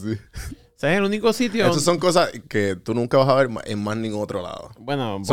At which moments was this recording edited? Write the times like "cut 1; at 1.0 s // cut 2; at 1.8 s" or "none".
cut 1; at 2.4 s